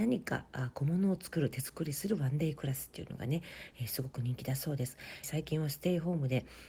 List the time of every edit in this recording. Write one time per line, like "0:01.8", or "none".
0:05.2

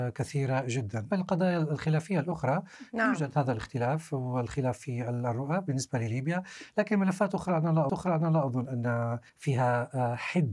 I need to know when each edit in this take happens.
0:01.1
0:07.9
0:09.3

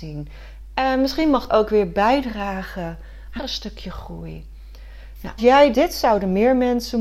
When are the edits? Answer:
0:01.5
0:03.4
0:05.4
0:05.7

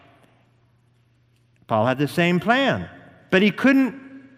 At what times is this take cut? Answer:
none

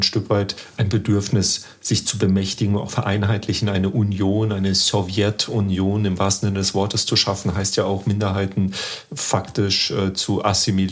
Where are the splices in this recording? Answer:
0:02.9

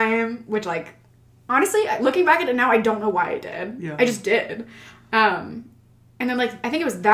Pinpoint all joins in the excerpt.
none

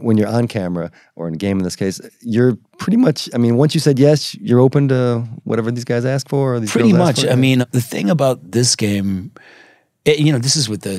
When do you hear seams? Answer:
none

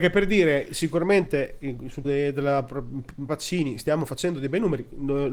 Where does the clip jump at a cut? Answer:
0:02.0
0:03.3

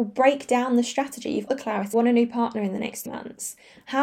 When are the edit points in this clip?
0:01.5
0:01.9
0:03.1

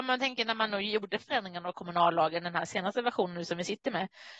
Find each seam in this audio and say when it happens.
none

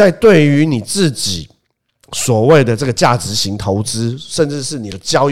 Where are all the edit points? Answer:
none

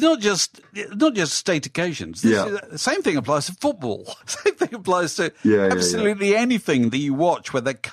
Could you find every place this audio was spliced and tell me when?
0:04.2

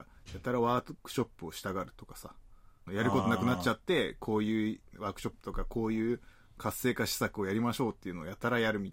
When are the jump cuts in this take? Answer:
0:02.9
0:04.9

